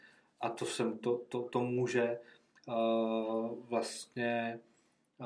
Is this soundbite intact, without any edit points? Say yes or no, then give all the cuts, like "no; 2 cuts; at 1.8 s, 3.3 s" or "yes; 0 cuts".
yes; 0 cuts